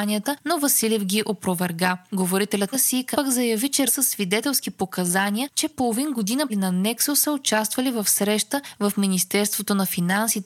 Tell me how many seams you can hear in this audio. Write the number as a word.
five